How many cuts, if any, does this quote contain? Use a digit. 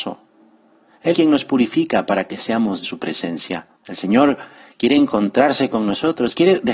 3